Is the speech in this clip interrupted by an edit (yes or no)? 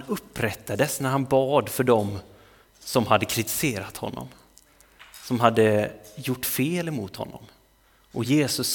no